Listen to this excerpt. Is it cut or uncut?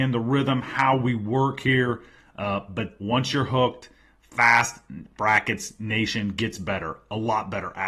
cut